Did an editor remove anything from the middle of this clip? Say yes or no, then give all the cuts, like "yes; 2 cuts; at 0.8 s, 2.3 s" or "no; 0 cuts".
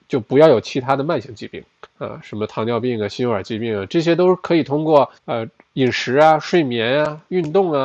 yes; 2 cuts; at 1.9 s, 5.2 s